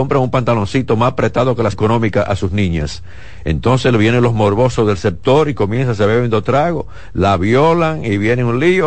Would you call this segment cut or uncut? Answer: cut